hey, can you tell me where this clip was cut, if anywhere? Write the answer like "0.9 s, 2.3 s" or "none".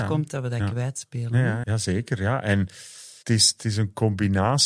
1.6 s, 3.2 s